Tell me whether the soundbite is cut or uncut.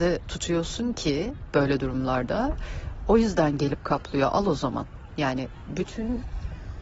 uncut